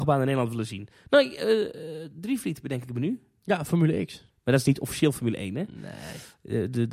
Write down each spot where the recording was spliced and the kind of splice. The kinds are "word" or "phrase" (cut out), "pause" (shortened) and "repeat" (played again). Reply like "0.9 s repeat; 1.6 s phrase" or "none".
none

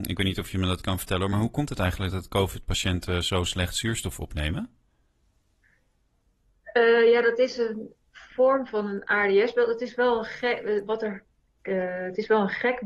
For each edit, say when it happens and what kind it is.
none

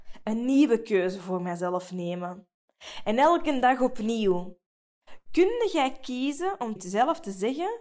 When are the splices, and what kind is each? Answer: 6.8 s word

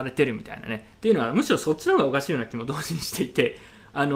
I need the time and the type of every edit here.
0.9 s pause

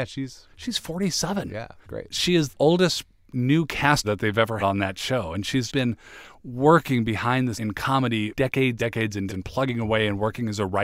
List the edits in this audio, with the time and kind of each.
1.8 s word; 2.5 s word; 4.0 s word; 4.6 s word; 5.7 s word; 7.5 s word; 8.3 s word; 8.8 s word; 9.3 s word

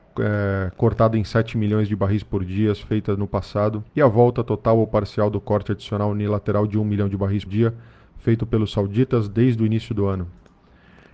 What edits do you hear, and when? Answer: 3.9 s pause; 7.5 s word

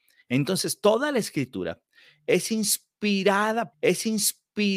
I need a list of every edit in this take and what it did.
3.7 s repeat

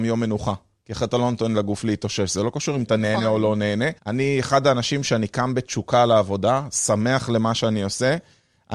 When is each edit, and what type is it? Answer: 4.0 s pause

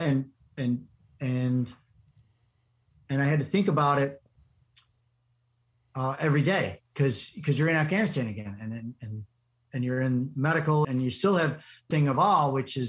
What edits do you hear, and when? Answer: 10.8 s word; 11.9 s word

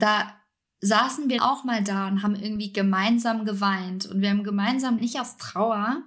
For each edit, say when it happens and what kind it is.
1.4 s word; 5.0 s word

